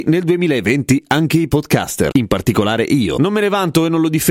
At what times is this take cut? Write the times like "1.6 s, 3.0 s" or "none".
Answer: none